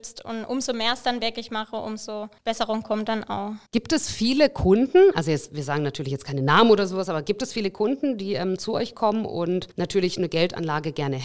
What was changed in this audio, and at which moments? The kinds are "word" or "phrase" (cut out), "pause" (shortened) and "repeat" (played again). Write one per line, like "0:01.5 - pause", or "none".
0:02.4 - pause
0:03.7 - pause
0:09.7 - pause